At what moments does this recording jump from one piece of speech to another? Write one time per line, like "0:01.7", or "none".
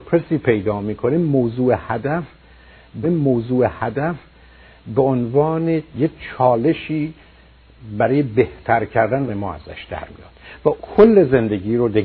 0:03.0
0:09.3
0:10.8